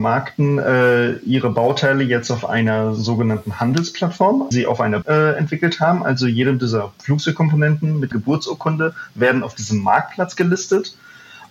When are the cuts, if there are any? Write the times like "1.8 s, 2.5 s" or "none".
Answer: 4.5 s, 5.0 s, 8.1 s